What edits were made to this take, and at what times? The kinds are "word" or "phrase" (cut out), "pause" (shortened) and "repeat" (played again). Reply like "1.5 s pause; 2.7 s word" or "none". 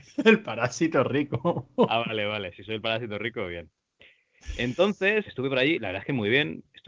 5.3 s word